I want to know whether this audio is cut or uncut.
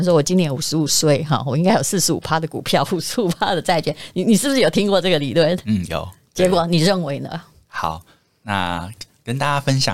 uncut